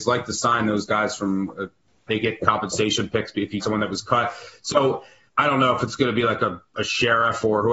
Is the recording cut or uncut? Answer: cut